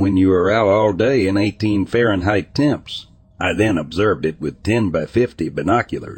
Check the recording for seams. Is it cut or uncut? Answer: uncut